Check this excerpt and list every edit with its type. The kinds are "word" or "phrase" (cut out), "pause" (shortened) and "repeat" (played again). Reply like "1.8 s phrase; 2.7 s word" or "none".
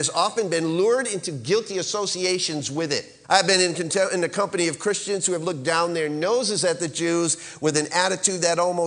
3.2 s pause